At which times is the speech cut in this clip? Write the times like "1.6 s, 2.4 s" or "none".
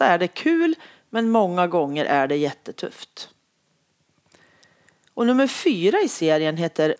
none